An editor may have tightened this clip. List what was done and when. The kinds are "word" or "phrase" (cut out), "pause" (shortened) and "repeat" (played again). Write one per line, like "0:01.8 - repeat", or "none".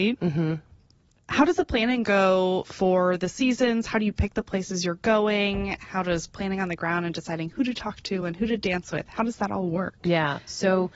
none